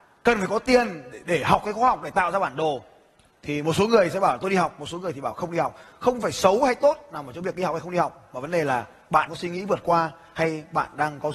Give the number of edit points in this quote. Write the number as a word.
one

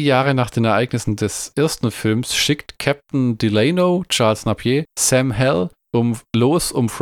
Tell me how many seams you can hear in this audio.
zero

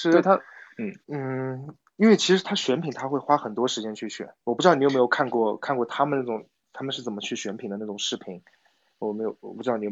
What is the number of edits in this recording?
two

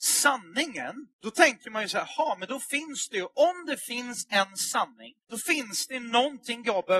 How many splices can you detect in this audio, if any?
two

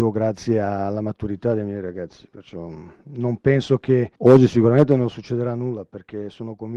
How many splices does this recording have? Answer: one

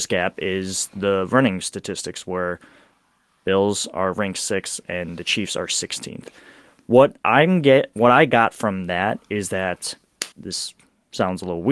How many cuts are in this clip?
one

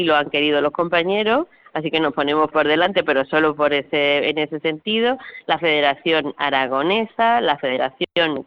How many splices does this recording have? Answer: one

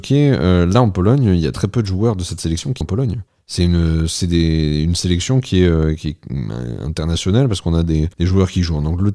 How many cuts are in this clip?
four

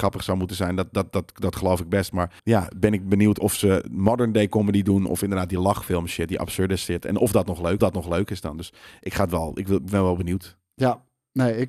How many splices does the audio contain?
two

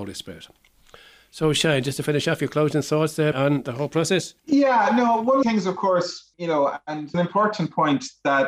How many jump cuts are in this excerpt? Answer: five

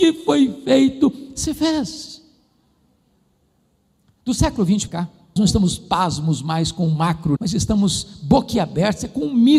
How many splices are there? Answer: three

